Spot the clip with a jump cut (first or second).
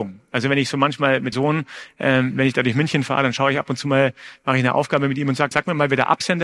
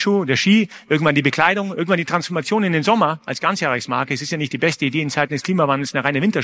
first